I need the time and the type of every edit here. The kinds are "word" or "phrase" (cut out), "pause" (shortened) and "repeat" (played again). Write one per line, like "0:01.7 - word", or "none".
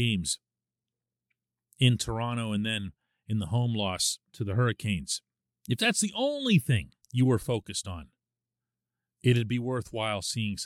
0:05.4 - pause
0:07.0 - pause